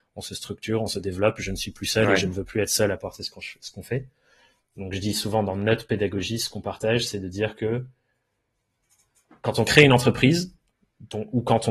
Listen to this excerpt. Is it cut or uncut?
uncut